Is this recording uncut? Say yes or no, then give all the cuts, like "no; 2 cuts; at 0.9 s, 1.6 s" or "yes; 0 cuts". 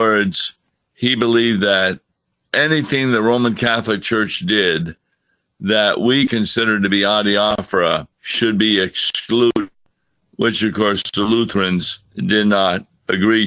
no; 2 cuts; at 8.1 s, 12.0 s